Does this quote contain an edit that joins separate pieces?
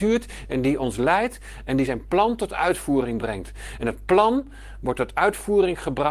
no; 0 cuts

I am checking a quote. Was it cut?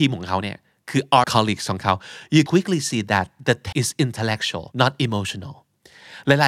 yes; 4 cuts; at 1.2 s, 2.5 s, 3.7 s, 4.7 s

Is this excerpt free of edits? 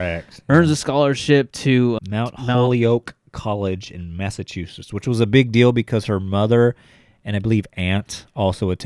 no; 1 cut; at 2.0 s

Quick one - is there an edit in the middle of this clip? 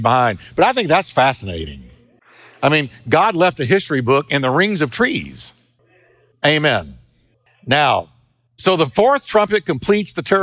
no; 0 cuts

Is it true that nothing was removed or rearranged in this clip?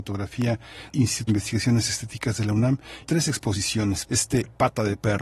no; 4 cuts; at 0.9 s, 1.3 s, 3.0 s, 4.0 s

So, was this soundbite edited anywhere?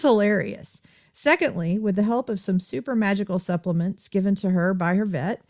no; 0 cuts

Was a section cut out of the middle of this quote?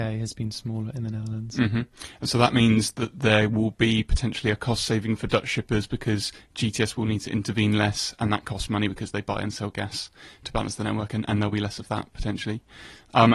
no; 0 cuts

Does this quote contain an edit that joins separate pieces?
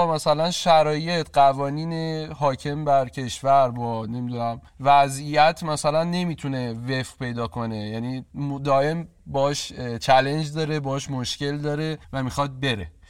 yes; 2 cuts; at 4.7 s, 12.0 s

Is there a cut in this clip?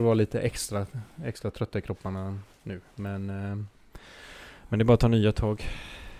no; 0 cuts

